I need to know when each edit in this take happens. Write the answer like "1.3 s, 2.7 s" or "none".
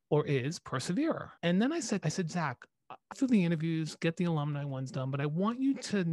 1.4 s, 2.0 s, 3.1 s